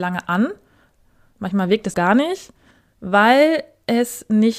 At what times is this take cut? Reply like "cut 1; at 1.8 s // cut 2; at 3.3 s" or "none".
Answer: cut 1; at 1.9 s // cut 2; at 2.7 s

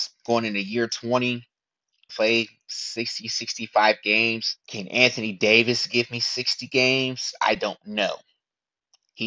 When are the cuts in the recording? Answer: cut 1; at 2.1 s // cut 2; at 4.6 s

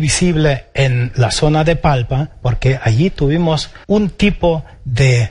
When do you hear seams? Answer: cut 1; at 3.8 s

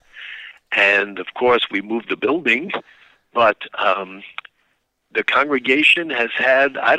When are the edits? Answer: none

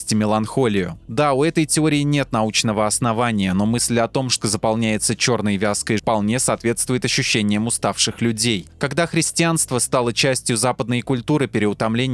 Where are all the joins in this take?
cut 1; at 4.4 s // cut 2; at 6.0 s

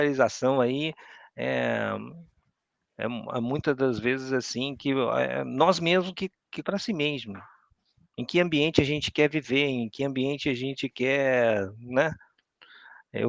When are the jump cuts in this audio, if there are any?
cut 1; at 6.6 s

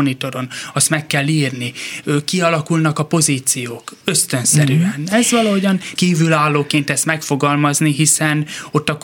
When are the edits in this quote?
cut 1; at 4.0 s // cut 2; at 6.0 s

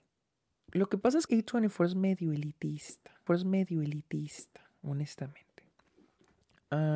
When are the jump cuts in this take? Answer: cut 1; at 1.3 s // cut 2; at 3.3 s

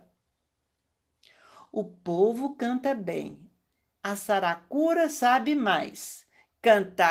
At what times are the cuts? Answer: none

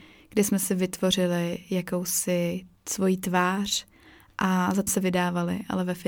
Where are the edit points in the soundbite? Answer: cut 1; at 4.9 s

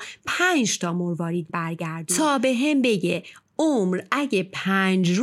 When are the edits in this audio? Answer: cut 1; at 1.5 s

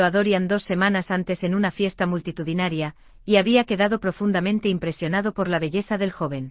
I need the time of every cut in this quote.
none

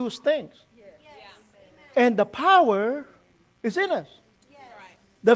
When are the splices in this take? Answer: none

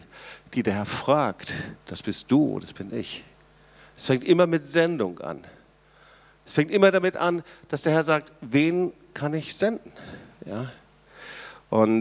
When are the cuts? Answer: none

